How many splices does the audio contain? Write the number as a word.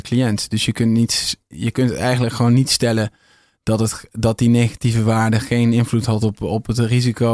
zero